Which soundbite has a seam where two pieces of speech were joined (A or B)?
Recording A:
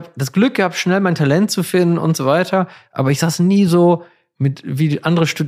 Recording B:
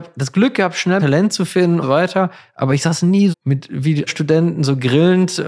B